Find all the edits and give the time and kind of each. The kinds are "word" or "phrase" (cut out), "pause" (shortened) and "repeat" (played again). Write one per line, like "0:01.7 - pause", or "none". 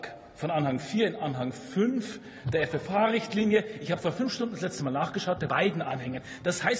0:05.5 - phrase